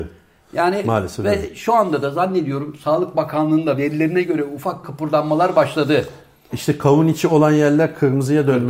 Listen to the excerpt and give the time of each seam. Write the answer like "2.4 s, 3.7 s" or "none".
4.8 s